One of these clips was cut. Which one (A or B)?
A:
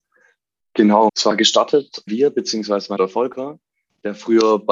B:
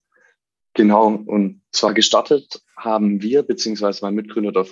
A